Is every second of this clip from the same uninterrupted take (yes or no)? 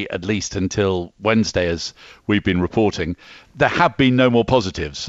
yes